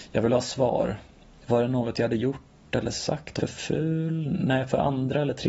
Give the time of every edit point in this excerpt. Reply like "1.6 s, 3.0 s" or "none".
3.4 s